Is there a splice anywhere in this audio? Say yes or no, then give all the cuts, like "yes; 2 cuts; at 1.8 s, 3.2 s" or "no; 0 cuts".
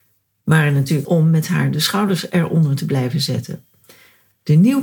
yes; 1 cut; at 1.0 s